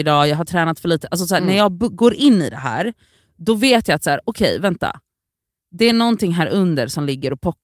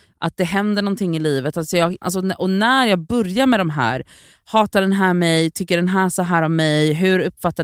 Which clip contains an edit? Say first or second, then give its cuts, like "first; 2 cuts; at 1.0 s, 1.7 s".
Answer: second; 1 cut; at 2.0 s